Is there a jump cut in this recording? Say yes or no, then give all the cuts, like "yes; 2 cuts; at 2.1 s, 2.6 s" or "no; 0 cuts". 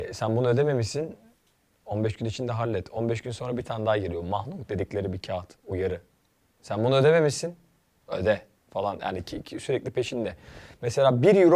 no; 0 cuts